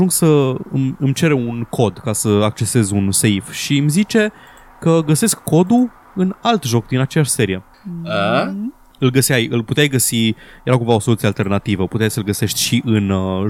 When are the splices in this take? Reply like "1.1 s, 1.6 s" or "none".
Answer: none